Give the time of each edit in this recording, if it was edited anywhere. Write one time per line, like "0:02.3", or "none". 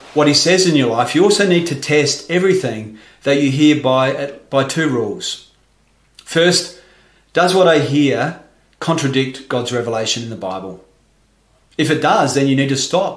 none